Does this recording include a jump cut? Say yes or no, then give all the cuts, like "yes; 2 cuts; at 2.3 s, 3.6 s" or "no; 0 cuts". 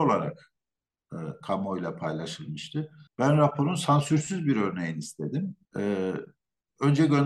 yes; 2 cuts; at 3.1 s, 5.6 s